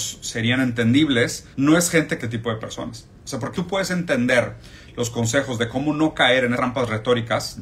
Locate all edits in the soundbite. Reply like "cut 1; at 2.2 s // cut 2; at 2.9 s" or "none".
cut 1; at 1.5 s // cut 2; at 2.2 s // cut 3; at 3.5 s // cut 4; at 6.6 s